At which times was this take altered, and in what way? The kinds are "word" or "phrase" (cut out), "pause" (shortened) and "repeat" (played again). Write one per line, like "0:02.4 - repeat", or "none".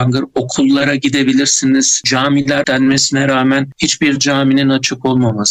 0:02.6 - word